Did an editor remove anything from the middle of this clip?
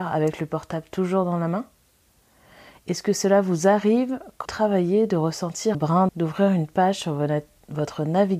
yes; 3 cuts; at 4.5 s, 5.7 s, 6.1 s

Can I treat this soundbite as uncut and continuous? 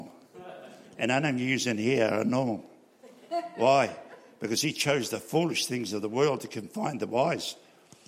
yes; 0 cuts

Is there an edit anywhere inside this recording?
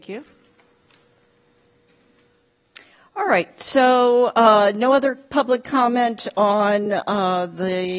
no; 0 cuts

